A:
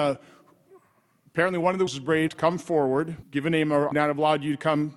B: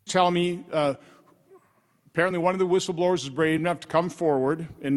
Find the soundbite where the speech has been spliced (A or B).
A